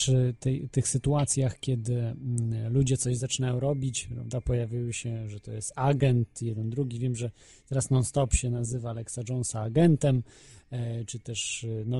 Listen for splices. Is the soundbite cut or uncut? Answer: uncut